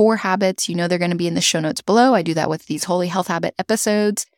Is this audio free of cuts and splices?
yes; 0 cuts

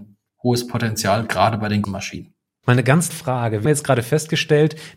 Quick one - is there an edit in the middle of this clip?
yes; 3 cuts; at 1.8 s, 3.1 s, 3.6 s

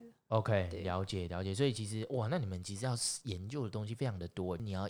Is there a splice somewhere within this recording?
no; 0 cuts

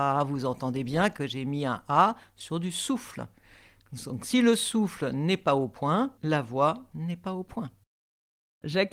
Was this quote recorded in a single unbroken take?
no; 1 cut; at 6.2 s

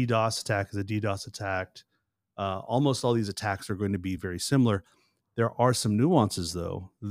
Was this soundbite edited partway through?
no; 0 cuts

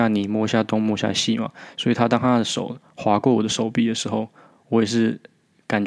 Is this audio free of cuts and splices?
yes; 0 cuts

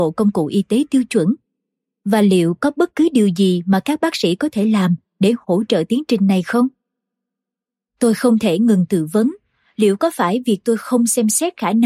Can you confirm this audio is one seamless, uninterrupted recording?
yes; 0 cuts

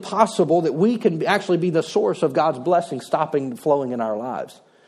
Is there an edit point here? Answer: no; 0 cuts

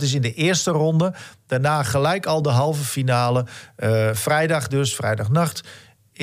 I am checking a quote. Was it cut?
no; 0 cuts

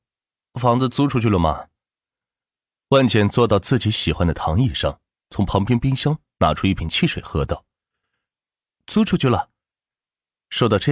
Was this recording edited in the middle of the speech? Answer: no; 0 cuts

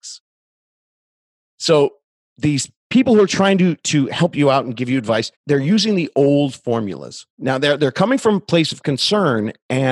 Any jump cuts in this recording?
yes; 3 cuts; at 2.8 s, 5.3 s, 7.3 s

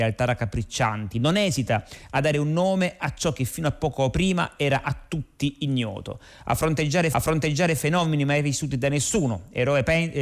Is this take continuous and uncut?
no; 1 cut; at 7.1 s

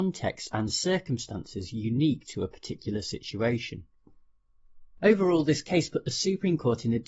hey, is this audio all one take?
yes; 0 cuts

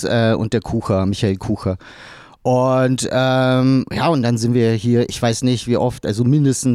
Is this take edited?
no; 0 cuts

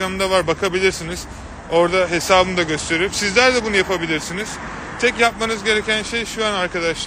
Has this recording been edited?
no; 0 cuts

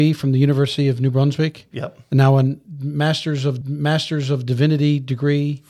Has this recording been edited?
yes; 1 cut; at 3.6 s

